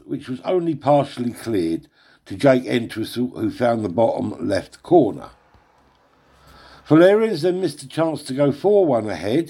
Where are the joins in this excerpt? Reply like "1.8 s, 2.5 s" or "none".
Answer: none

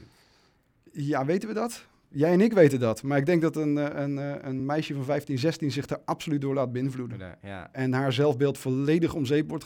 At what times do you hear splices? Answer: none

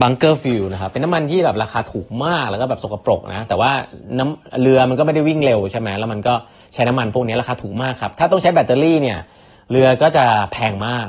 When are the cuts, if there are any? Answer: none

